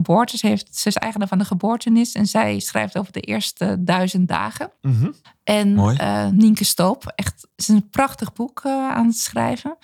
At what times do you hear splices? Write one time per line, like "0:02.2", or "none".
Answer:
0:04.8
0:05.2